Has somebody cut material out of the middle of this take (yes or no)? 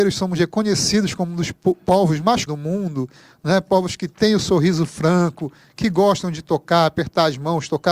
yes